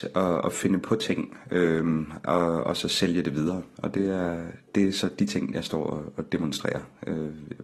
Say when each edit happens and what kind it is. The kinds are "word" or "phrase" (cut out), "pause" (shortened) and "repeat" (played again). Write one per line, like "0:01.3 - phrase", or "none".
none